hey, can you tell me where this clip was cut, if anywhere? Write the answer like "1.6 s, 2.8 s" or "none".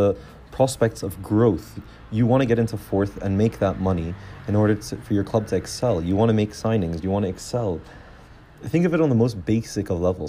none